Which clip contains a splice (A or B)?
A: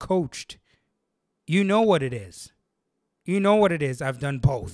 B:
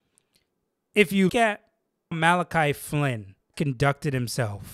B